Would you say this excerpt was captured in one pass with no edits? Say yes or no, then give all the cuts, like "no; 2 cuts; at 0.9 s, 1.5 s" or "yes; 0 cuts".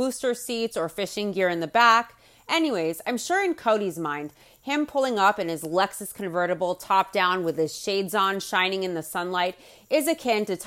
yes; 0 cuts